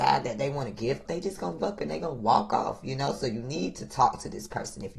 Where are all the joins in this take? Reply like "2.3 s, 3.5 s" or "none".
1.0 s, 1.6 s